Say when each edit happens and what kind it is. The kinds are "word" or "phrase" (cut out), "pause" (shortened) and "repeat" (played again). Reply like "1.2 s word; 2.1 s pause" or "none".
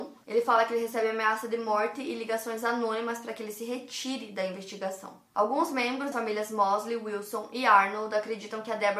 6.1 s word